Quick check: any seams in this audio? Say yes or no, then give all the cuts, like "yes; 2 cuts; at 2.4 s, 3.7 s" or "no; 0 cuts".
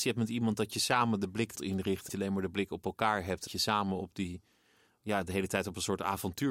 yes; 3 cuts; at 1.5 s, 2.1 s, 3.5 s